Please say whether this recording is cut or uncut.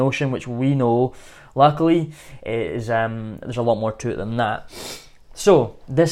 uncut